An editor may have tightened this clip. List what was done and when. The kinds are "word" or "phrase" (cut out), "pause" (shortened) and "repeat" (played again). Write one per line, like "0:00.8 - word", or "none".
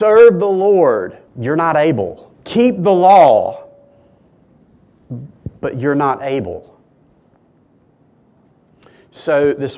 0:01.3 - pause
0:02.4 - pause